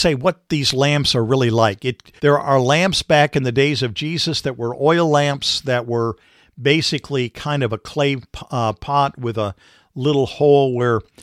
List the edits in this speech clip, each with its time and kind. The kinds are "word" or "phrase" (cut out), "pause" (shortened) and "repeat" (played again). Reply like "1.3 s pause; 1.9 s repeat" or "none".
2.2 s pause